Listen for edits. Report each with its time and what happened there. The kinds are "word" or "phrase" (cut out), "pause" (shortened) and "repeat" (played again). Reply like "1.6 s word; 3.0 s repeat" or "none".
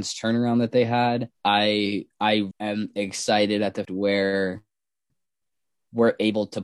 1.3 s pause; 2.5 s word; 3.8 s word